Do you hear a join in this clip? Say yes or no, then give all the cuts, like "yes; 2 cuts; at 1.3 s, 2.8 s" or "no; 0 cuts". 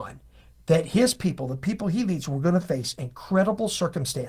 no; 0 cuts